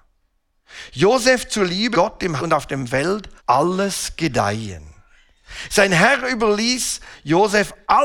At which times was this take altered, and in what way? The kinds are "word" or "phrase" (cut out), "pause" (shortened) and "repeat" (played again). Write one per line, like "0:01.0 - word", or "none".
0:01.9 - word
0:02.4 - word
0:03.4 - pause